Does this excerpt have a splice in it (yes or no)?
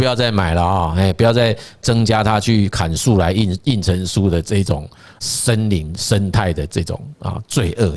no